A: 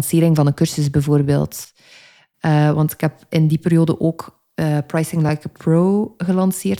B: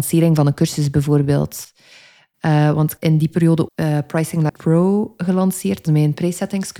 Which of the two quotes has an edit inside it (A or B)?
B